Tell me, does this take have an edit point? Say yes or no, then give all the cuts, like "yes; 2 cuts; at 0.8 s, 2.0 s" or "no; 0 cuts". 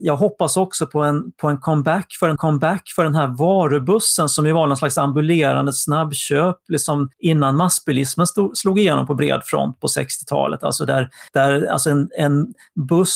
yes; 4 cuts; at 2.4 s, 7.1 s, 11.3 s, 12.1 s